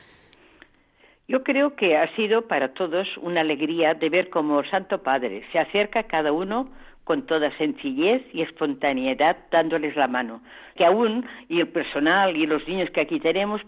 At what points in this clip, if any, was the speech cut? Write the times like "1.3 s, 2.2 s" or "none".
10.8 s